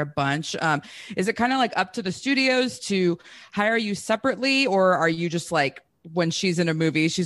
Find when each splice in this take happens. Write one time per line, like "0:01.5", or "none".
none

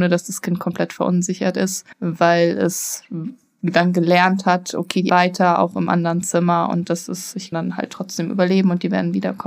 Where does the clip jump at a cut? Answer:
0:01.9
0:05.1
0:07.5

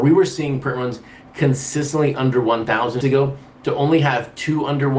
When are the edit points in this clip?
0:03.0

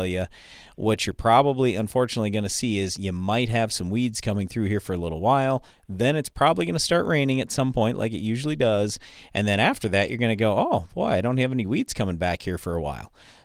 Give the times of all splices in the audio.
none

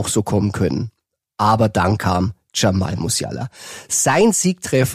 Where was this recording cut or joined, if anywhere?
none

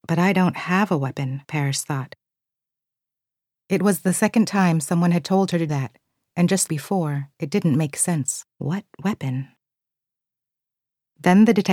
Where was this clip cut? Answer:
0:01.4
0:05.7
0:06.7
0:07.3
0:08.5

